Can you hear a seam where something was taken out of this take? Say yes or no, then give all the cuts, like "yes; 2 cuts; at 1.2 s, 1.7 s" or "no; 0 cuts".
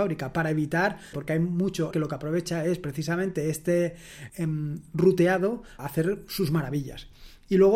yes; 4 cuts; at 1.1 s, 1.9 s, 4.3 s, 5.8 s